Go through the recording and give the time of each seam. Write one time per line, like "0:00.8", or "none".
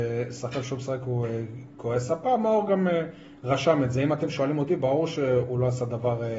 none